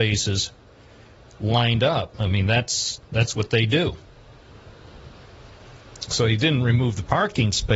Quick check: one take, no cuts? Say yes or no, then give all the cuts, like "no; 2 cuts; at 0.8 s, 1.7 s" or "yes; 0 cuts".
no; 1 cut; at 3.0 s